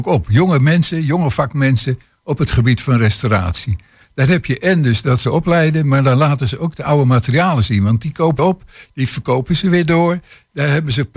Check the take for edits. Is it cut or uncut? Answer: cut